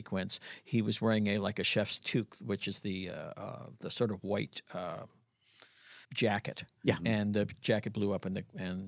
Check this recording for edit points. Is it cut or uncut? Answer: cut